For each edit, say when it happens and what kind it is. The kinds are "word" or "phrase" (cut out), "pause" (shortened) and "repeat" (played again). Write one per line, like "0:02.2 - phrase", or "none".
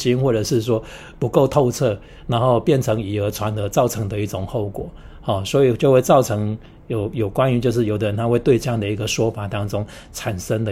none